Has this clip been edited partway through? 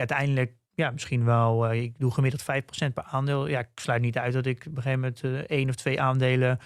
no; 0 cuts

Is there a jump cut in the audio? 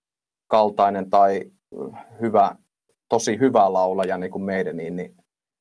no; 0 cuts

